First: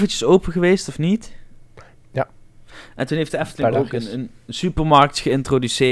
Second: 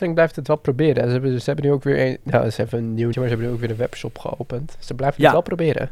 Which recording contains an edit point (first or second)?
second